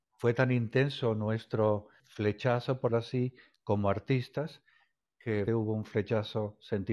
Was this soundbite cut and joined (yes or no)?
yes